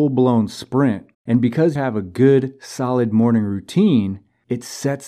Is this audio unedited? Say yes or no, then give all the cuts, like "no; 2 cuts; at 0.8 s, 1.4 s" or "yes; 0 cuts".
no; 2 cuts; at 1.1 s, 1.8 s